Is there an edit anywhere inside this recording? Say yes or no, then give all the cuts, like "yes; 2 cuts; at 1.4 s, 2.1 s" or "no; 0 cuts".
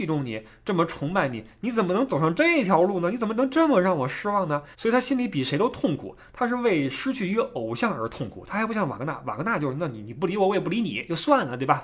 yes; 1 cut; at 4.7 s